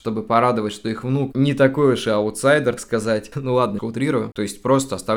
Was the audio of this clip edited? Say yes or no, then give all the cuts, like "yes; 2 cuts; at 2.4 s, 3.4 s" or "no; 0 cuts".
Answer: yes; 3 cuts; at 1.3 s, 2.8 s, 3.8 s